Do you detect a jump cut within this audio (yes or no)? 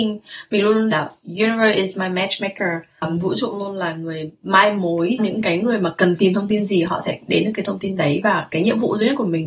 yes